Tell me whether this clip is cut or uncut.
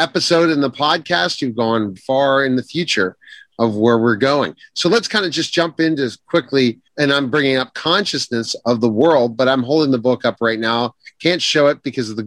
cut